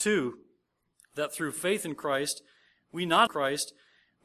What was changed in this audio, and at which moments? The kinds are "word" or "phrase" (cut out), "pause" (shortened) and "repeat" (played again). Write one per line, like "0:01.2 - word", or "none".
0:03.3 - repeat